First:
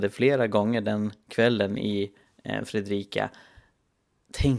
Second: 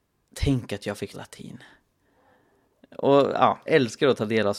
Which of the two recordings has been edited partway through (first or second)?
second